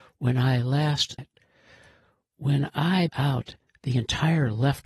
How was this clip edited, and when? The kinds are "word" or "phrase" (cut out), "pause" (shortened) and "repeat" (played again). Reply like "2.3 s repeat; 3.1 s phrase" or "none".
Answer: 1.2 s word; 3.1 s word